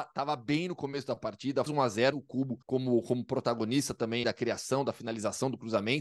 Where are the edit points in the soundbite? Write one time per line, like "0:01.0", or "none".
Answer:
0:01.7
0:02.1
0:02.6
0:04.2